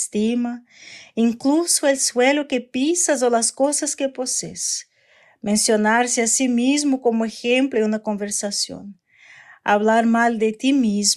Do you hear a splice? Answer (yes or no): no